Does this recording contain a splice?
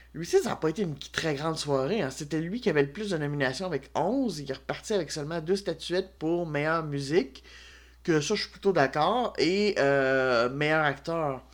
no; 0 cuts

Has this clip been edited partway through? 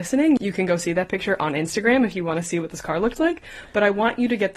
no; 0 cuts

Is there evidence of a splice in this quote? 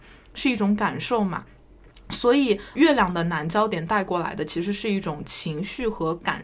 yes; 1 cut; at 2.8 s

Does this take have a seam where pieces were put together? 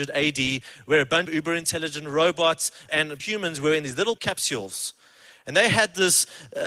yes; 4 cuts; at 1.3 s, 2.9 s, 3.2 s, 4.2 s

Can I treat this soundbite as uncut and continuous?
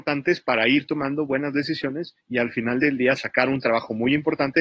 no; 1 cut; at 2.2 s

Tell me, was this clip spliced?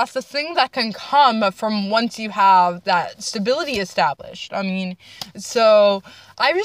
no; 0 cuts

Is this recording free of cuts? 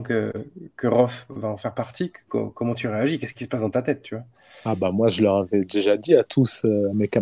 yes; 0 cuts

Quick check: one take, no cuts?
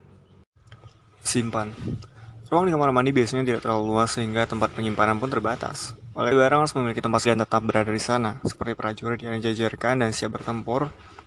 no; 2 cuts; at 6.3 s, 7.3 s

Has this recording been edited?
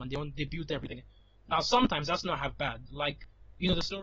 no; 0 cuts

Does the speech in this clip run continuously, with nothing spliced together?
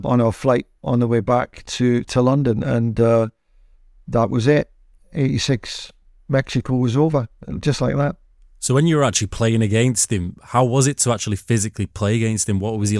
yes; 0 cuts

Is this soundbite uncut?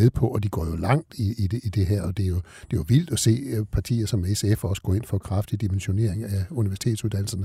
yes; 0 cuts

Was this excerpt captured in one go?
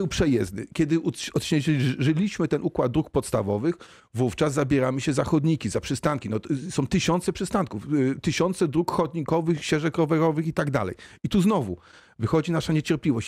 yes; 0 cuts

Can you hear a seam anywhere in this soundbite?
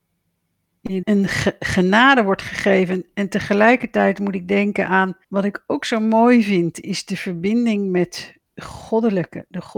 yes; 3 cuts; at 1.0 s, 5.2 s, 8.5 s

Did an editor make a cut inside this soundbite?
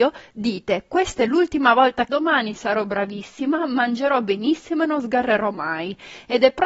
yes; 1 cut; at 2.1 s

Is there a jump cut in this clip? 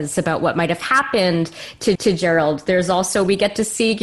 yes; 1 cut; at 2.0 s

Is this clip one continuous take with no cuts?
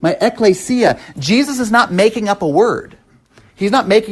yes; 0 cuts

